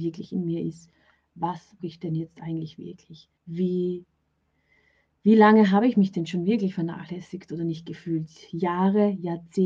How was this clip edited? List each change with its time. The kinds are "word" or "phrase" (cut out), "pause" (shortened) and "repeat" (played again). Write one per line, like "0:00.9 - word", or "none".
0:01.8 - word
0:03.3 - pause